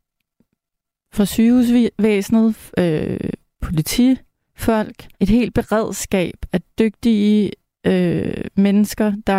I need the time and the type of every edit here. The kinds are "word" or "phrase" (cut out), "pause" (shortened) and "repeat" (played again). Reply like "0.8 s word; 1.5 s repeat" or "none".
5.1 s pause